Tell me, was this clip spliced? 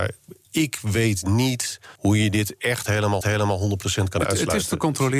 yes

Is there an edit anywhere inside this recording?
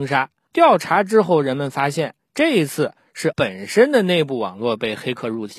yes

